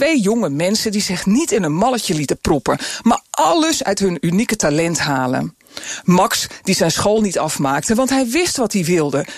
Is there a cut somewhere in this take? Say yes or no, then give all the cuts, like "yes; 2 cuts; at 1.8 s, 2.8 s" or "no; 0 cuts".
no; 0 cuts